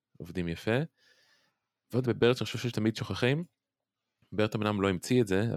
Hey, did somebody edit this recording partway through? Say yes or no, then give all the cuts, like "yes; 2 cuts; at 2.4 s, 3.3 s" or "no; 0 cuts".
yes; 1 cut; at 2.0 s